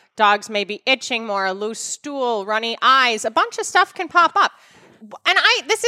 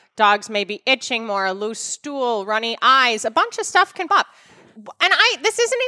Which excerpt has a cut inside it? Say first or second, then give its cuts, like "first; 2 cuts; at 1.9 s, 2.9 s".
second; 1 cut; at 4.1 s